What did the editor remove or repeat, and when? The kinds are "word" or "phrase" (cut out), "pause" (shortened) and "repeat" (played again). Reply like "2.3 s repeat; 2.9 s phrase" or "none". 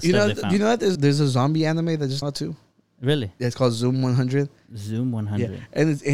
1.0 s word; 2.2 s word